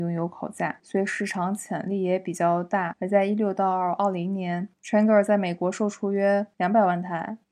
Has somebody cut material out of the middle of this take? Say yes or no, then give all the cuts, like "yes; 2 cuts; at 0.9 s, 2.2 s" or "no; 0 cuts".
no; 0 cuts